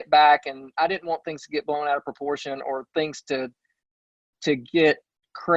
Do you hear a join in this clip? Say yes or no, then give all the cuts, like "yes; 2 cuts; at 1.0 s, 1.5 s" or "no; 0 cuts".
no; 0 cuts